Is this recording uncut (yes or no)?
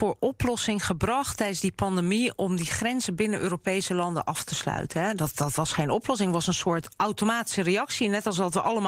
yes